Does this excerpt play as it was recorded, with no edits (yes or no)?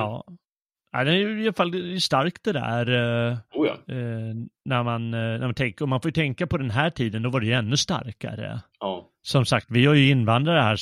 yes